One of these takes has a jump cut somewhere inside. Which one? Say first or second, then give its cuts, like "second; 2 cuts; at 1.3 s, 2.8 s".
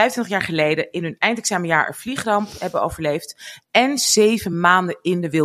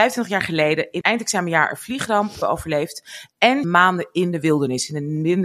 second; 3 cuts; at 1.0 s, 2.4 s, 3.6 s